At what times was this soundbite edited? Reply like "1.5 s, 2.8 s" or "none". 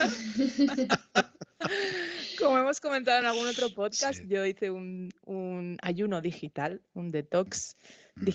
none